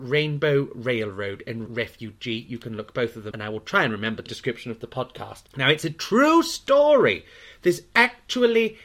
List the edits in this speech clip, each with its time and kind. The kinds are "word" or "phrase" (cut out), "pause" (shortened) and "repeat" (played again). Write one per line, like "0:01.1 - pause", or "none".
0:01.7 - word
0:03.3 - word
0:04.3 - phrase
0:05.5 - pause

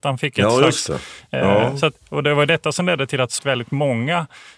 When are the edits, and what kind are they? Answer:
0:03.4 - word

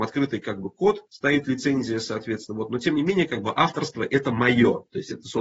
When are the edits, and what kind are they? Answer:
0:01.1 - pause

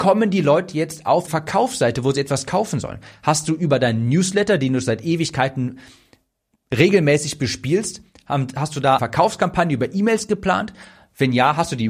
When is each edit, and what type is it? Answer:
0:01.3 - word
0:09.0 - word

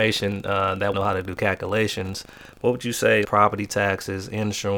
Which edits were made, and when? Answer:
0:00.9 - phrase
0:03.2 - word

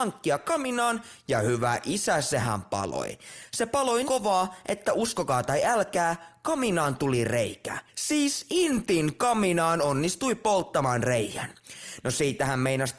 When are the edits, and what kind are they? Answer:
0:04.0 - word
0:07.9 - pause

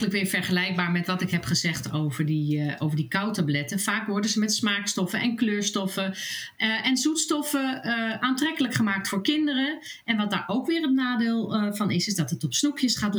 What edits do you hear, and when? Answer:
none

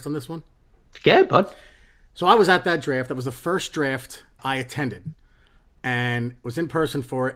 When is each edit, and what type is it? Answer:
0:04.4 - word

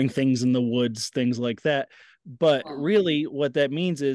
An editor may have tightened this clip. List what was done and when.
none

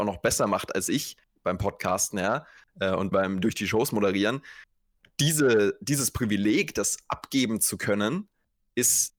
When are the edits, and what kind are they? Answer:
0:03.1 - word

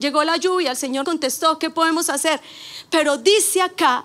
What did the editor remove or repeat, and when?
0:01.0 - word

